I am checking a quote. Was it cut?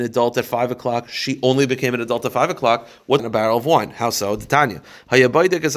yes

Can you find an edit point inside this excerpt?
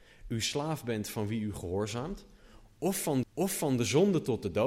yes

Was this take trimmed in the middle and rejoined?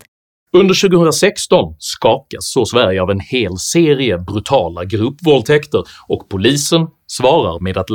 no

